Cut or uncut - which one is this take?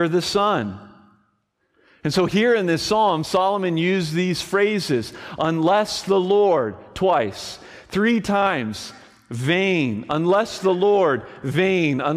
uncut